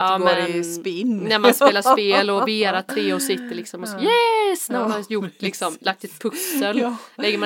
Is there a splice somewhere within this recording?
no; 0 cuts

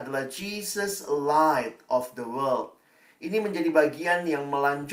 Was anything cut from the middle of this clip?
no; 0 cuts

